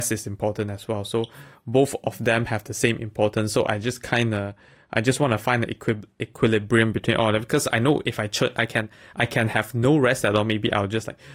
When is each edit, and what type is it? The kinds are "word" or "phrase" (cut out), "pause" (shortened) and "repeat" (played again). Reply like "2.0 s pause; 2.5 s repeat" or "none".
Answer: none